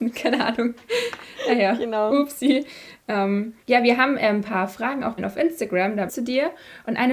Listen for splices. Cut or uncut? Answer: cut